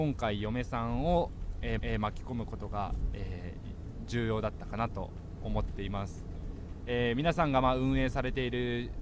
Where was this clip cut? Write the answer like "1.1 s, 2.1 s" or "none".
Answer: 1.8 s